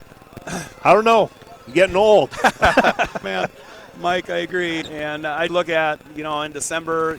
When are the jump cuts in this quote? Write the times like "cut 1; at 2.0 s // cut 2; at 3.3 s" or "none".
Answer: cut 1; at 3.2 s // cut 2; at 4.8 s // cut 3; at 5.5 s

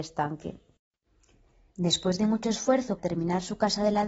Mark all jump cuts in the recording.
cut 1; at 3.0 s

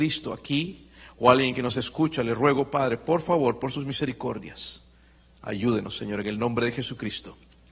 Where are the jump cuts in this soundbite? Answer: none

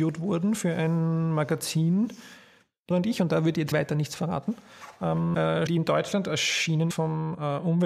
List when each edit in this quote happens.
cut 1; at 2.9 s // cut 2; at 3.7 s // cut 3; at 5.7 s // cut 4; at 6.9 s

